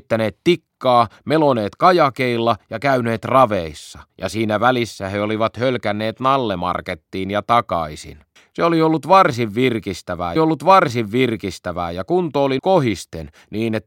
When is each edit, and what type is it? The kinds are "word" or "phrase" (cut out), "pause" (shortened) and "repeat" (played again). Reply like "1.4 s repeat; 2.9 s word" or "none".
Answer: 4.1 s pause; 8.4 s pause; 10.4 s repeat; 12.6 s word